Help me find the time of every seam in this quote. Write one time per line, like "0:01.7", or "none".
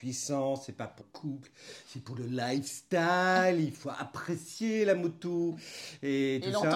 0:01.0